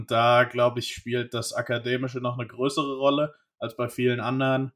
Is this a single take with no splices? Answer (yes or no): yes